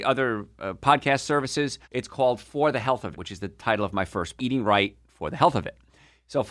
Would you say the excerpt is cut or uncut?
cut